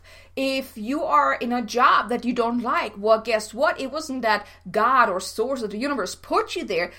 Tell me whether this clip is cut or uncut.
uncut